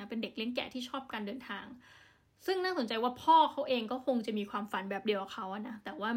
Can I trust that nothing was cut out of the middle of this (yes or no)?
yes